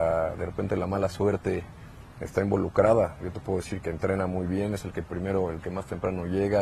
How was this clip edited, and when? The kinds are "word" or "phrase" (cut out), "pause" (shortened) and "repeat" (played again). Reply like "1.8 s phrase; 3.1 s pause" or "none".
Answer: 3.8 s word